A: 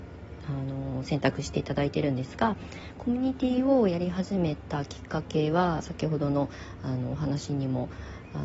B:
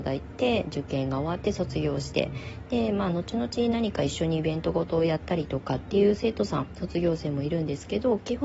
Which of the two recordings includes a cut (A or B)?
A